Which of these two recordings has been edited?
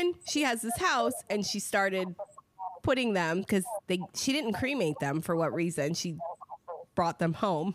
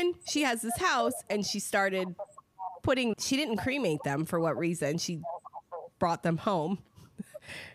second; 1 cut; at 3.1 s

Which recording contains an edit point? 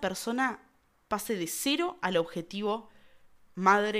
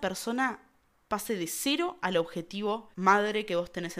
second; 1 cut; at 2.9 s

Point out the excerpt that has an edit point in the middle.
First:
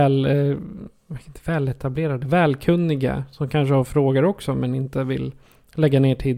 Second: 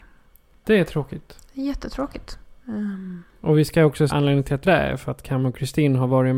second; 3 cuts; at 2.6 s, 4.1 s, 4.6 s

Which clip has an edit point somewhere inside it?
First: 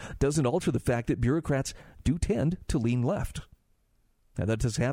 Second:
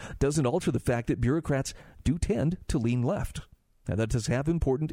second; 1 cut; at 3.7 s

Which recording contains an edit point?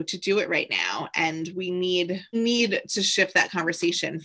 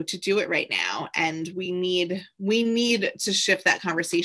first; 1 cut; at 2.3 s

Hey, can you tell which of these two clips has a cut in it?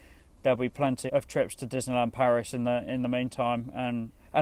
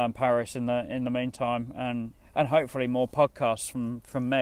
first; 1 cut; at 1.1 s

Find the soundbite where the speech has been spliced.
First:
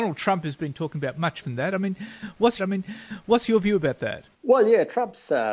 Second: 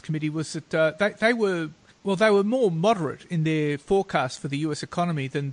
first; 3 cuts; at 1.4 s, 2.6 s, 4.3 s

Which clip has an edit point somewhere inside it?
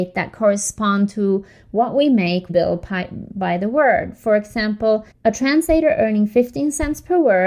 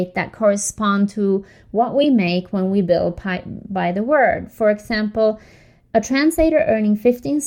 first; 2 cuts; at 2.5 s, 5.1 s

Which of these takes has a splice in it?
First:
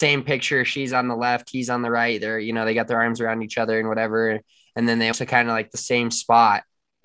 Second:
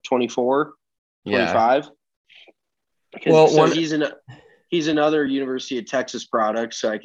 first; 1 cut; at 5.1 s

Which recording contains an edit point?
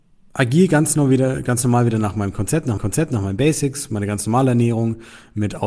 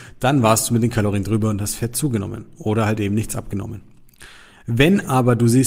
first; 1 cut; at 2.8 s

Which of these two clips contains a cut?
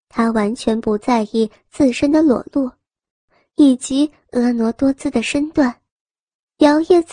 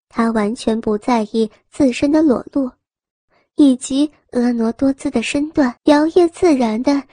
second; 1 cut; at 5.8 s

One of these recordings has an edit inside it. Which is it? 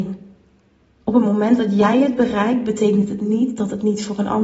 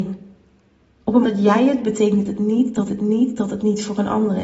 second; 3 cuts; at 1.2 s, 1.8 s, 2.9 s

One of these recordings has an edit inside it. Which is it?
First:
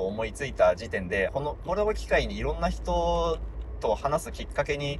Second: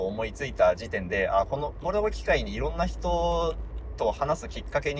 first; 1 cut; at 1.3 s

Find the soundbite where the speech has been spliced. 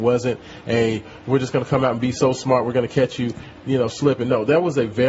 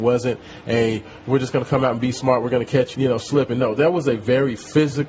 second; 2 cuts; at 2.1 s, 2.9 s

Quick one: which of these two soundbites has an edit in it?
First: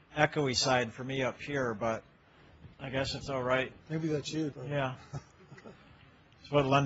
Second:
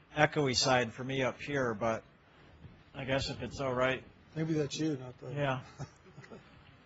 first; 4 cuts; at 2.7 s, 3.2 s, 3.8 s, 4.5 s

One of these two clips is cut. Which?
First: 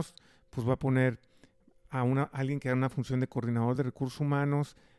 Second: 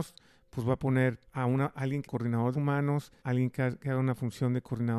second; 4 cuts; at 1.2 s, 2.0 s, 2.5 s, 3.2 s

